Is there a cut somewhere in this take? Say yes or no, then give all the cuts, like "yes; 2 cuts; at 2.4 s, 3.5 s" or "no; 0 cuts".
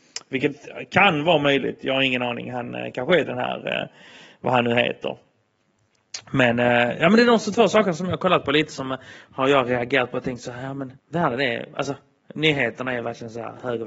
yes; 2 cuts; at 3.3 s, 11.0 s